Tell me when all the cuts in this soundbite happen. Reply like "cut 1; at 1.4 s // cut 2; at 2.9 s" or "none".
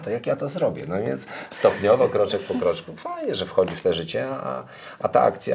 none